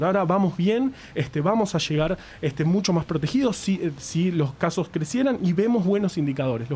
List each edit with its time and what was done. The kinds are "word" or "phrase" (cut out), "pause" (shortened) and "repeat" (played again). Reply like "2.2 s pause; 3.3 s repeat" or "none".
none